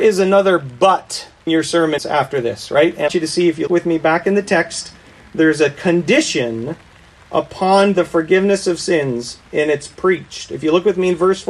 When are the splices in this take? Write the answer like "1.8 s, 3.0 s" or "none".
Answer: 1.5 s, 2.0 s, 3.1 s, 3.7 s